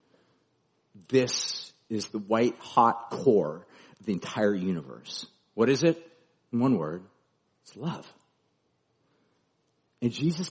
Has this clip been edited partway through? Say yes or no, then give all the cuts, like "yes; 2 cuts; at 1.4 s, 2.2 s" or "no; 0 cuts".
no; 0 cuts